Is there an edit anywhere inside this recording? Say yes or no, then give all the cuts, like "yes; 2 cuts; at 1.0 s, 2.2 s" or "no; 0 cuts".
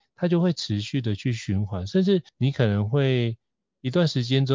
yes; 1 cut; at 2.3 s